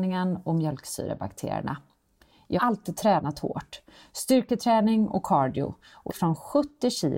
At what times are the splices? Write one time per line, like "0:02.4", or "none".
0:02.6
0:06.1